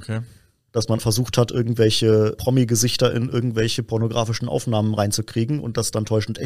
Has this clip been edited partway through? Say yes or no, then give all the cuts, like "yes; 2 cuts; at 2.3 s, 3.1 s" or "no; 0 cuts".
yes; 2 cuts; at 1.0 s, 2.3 s